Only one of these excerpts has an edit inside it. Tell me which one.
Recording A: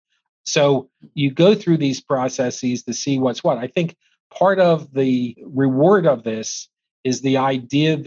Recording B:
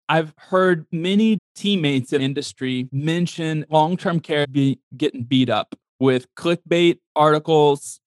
B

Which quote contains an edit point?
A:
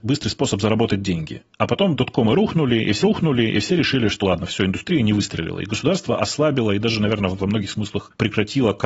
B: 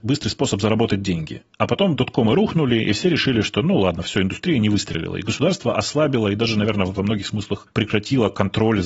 A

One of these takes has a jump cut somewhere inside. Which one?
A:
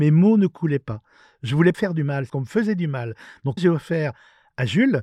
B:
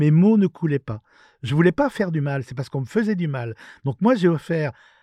A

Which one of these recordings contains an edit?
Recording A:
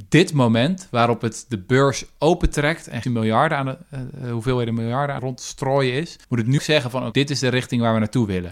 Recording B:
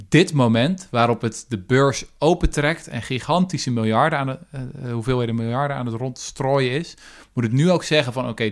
A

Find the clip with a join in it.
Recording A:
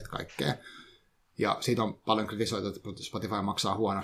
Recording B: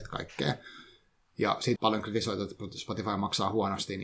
B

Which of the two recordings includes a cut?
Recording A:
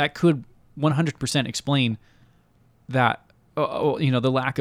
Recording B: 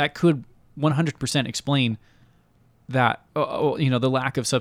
B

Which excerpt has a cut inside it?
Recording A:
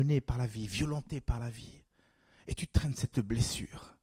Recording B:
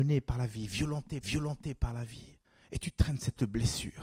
B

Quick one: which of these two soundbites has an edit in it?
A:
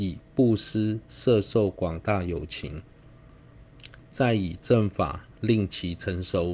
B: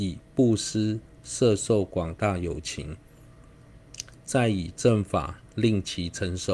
A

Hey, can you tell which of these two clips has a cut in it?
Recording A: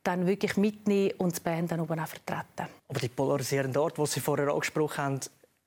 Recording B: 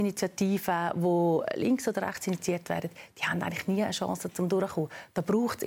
A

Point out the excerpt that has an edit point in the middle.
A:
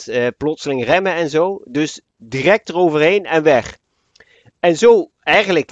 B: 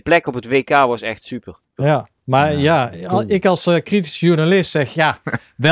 B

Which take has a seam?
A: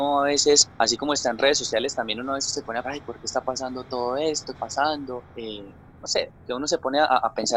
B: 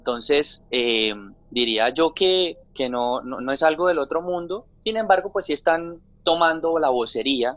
A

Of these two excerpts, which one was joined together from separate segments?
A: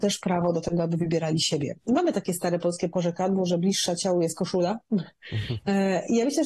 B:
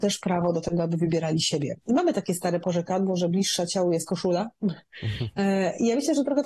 B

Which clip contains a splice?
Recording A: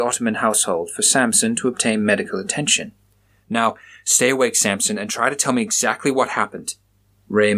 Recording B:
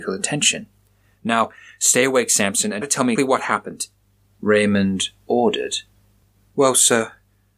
B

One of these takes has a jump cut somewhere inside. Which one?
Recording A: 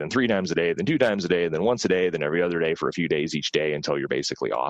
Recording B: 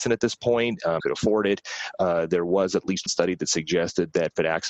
B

